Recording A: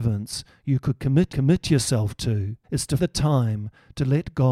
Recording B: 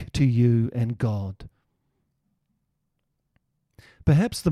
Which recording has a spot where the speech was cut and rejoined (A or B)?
A